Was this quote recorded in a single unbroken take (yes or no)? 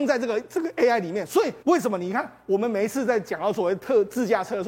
no